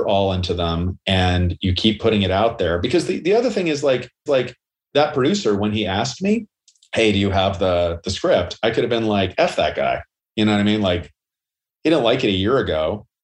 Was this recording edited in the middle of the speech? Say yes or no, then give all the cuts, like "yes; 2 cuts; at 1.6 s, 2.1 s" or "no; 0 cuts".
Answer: yes; 2 cuts; at 4.3 s, 6.6 s